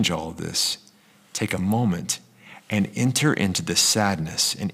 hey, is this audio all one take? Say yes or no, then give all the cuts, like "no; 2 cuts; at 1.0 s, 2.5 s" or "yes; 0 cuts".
yes; 0 cuts